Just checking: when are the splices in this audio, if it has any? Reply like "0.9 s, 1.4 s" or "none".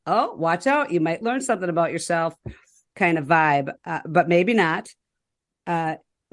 none

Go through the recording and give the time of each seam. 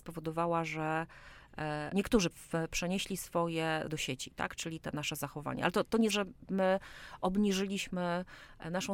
1.9 s, 2.3 s, 3.9 s, 4.8 s, 6.1 s

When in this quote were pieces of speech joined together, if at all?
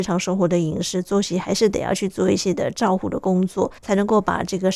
3.8 s

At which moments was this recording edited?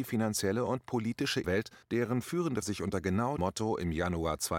1.4 s, 1.8 s, 2.6 s, 3.4 s

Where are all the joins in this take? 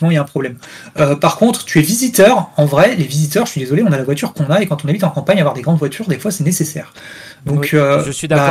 none

